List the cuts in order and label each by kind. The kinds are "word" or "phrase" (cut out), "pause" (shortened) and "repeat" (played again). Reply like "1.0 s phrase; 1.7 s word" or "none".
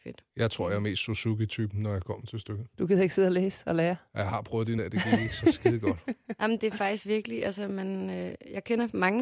4.8 s word

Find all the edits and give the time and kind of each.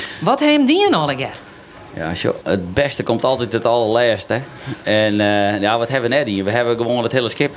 2.4 s word

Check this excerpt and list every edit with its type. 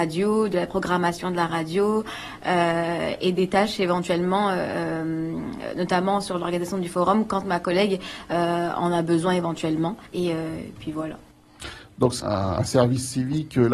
10.1 s pause; 12.2 s word

